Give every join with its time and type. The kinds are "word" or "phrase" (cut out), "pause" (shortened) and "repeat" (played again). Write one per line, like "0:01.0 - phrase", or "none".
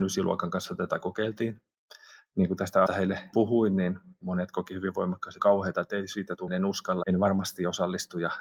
0:02.9 - word
0:03.3 - word
0:05.4 - phrase
0:06.5 - word
0:07.0 - word